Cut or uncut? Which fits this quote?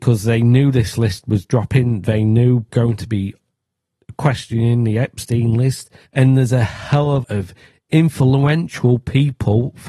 cut